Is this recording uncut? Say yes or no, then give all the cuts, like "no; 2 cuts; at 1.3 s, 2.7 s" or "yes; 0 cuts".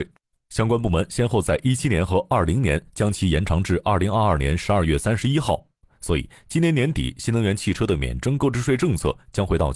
yes; 0 cuts